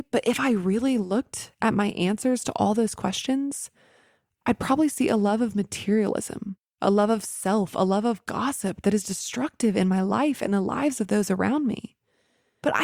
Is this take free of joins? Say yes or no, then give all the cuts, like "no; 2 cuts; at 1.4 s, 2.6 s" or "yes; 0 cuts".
yes; 0 cuts